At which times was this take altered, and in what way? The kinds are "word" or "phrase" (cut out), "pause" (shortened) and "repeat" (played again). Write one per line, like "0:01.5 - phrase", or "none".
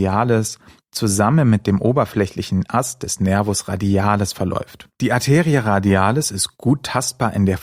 0:04.9 - pause